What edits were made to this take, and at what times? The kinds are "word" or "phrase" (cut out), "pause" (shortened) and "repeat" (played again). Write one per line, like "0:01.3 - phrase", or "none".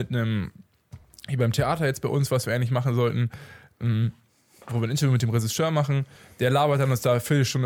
none